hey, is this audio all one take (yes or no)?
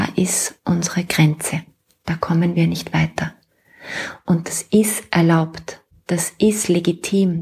yes